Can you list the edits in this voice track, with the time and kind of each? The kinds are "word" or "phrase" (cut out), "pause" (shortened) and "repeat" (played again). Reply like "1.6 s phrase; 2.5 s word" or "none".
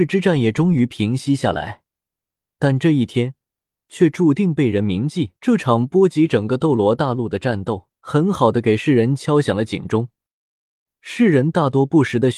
5.4 s pause; 8.0 s pause